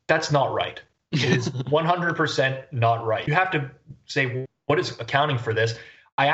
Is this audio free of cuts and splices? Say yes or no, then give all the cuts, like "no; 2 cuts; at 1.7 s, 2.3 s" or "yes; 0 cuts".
no; 1 cut; at 3.3 s